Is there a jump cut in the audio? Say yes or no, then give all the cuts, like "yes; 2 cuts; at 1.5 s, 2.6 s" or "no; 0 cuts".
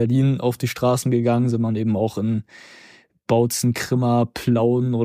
no; 0 cuts